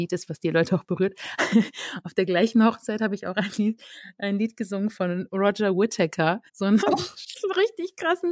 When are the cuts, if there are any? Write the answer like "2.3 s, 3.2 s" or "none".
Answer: 6.5 s, 6.8 s